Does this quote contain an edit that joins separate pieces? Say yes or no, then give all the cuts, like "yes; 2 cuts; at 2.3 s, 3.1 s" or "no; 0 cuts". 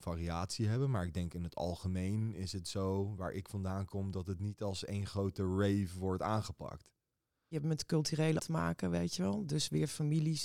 yes; 1 cut; at 8.4 s